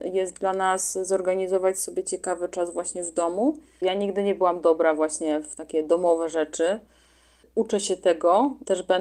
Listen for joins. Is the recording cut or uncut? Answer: uncut